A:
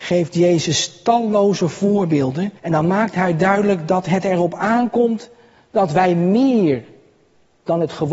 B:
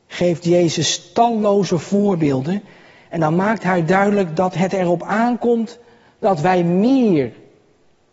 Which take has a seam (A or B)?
A